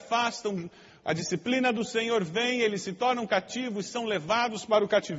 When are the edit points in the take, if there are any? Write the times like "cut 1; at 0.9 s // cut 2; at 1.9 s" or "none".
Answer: none